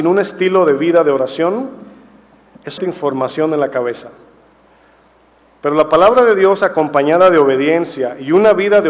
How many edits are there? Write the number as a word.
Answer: one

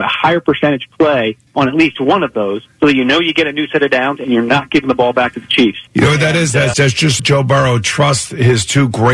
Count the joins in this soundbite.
five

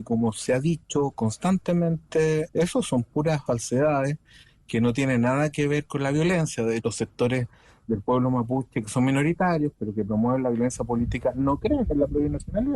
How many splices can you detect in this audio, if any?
three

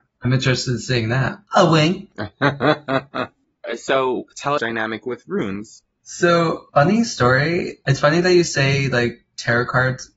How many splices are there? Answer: two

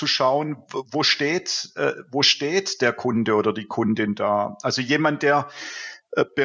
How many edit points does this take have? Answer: zero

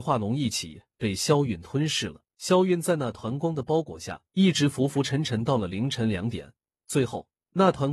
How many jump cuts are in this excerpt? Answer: three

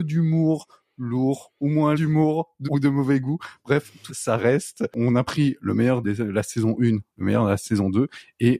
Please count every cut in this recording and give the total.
four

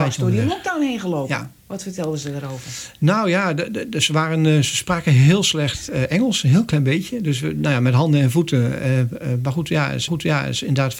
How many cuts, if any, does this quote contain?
two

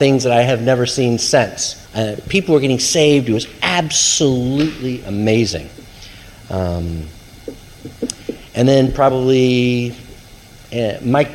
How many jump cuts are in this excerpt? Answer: one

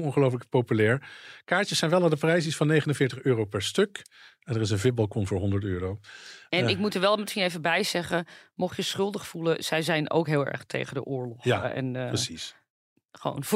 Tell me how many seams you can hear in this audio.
zero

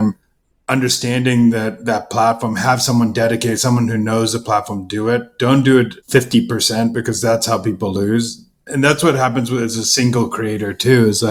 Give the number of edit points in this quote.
one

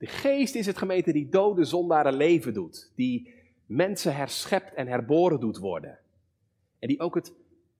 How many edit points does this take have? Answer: zero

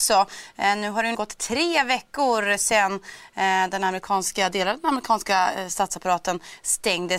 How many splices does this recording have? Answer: one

